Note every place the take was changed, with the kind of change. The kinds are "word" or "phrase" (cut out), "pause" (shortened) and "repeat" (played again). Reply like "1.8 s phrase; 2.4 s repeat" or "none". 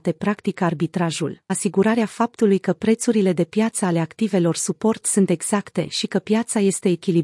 1.5 s phrase